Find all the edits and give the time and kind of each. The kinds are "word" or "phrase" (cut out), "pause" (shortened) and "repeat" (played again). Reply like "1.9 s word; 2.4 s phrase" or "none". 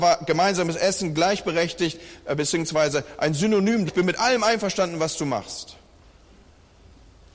3.9 s word

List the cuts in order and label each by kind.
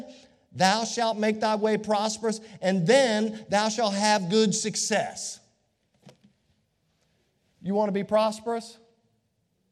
none

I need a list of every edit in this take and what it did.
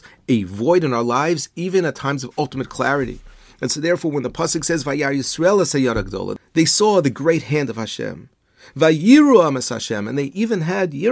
none

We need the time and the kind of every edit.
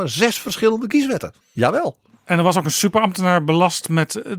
1.4 s pause

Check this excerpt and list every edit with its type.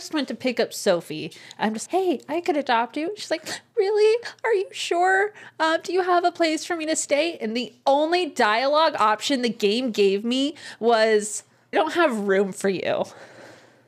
1.9 s word; 11.7 s word

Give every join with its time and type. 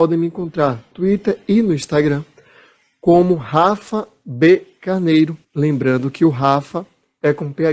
0.9 s word; 5.4 s pause

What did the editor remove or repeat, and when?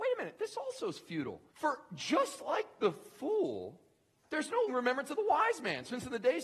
1.5 s pause; 4.7 s word

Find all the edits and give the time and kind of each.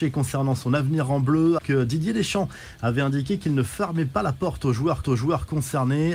1.6 s word; 5.0 s repeat

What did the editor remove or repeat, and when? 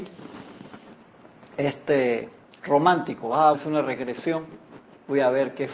2.4 s pause; 3.5 s word

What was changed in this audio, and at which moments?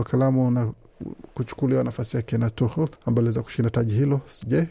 3.0 s pause

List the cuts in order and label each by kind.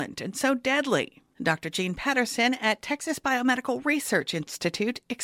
none

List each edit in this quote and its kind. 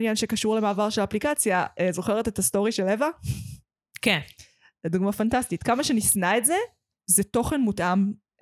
none

